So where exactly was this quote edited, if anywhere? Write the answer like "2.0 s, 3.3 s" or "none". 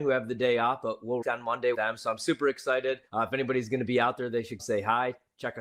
1.2 s, 1.7 s, 3.1 s, 4.6 s